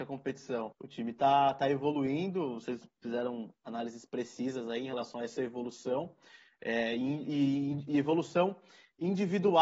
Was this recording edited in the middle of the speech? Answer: no; 0 cuts

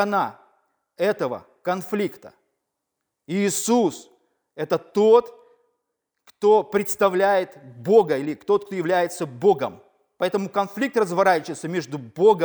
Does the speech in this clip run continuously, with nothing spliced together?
yes; 0 cuts

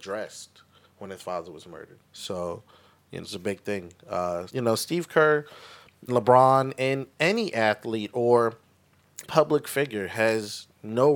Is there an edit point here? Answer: yes; 5 cuts; at 2.1 s, 3.2 s, 4.5 s, 6.1 s, 9.2 s

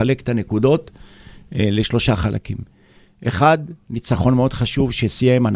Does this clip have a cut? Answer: no; 0 cuts

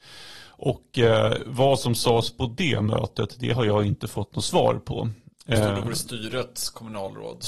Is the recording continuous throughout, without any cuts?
yes; 0 cuts

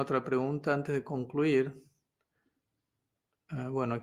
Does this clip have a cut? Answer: no; 0 cuts

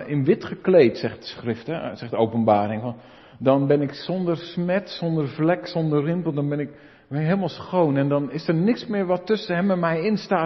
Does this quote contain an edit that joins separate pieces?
no; 0 cuts

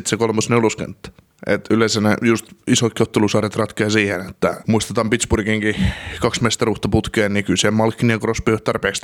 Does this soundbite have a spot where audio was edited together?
no; 0 cuts

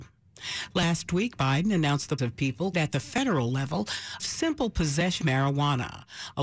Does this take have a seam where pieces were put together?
yes; 5 cuts; at 1.4 s, 2.2 s, 2.7 s, 4.2 s, 5.2 s

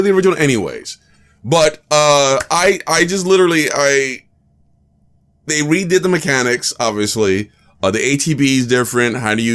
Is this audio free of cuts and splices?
yes; 0 cuts

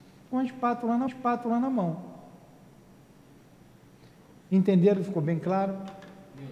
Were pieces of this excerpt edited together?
yes; 1 cut; at 1.1 s

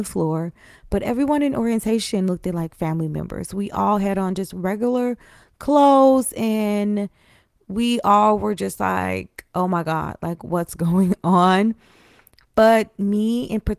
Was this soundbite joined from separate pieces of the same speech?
no; 0 cuts

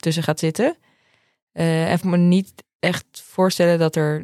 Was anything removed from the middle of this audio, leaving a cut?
yes; 1 cut; at 2.0 s

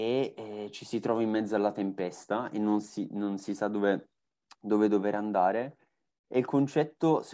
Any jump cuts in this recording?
no; 0 cuts

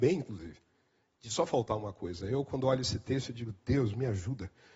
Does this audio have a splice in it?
no; 0 cuts

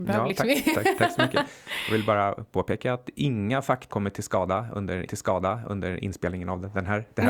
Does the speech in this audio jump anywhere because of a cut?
yes; 2 cuts; at 3.9 s, 5.1 s

